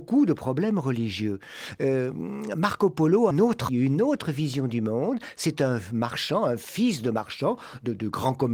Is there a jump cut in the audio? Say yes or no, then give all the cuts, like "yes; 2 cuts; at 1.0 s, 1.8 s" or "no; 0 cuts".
yes; 2 cuts; at 3.3 s, 3.7 s